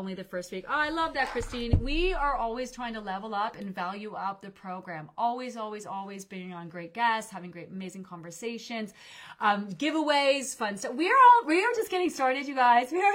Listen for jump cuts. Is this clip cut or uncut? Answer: uncut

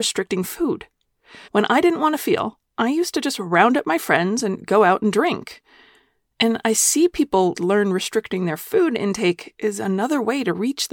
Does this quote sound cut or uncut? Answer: cut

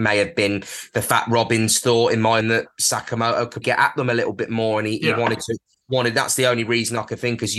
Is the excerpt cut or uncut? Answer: cut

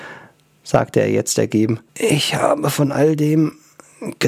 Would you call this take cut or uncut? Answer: cut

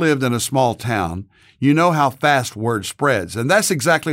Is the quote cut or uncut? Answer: uncut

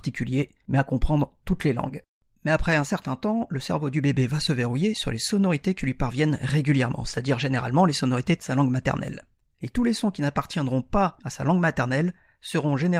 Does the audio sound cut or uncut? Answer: uncut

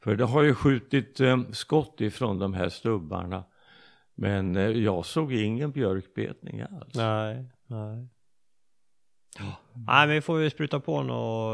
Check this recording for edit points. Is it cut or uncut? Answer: uncut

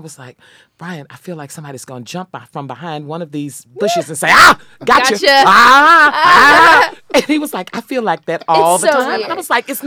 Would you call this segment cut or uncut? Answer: uncut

